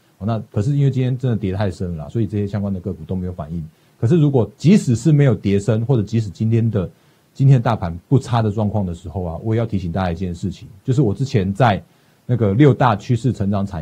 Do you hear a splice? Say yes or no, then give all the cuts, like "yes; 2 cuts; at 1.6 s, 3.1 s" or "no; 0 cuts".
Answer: no; 0 cuts